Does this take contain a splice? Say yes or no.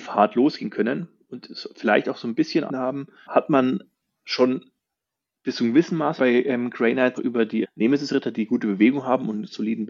yes